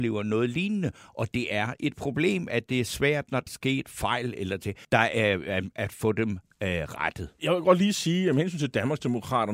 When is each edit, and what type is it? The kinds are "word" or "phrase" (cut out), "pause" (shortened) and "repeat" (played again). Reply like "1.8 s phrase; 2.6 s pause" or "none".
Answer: 3.5 s word; 4.8 s pause